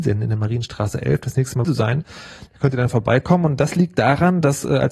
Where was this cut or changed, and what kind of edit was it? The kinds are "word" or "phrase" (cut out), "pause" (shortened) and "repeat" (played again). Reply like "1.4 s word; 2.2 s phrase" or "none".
1.6 s phrase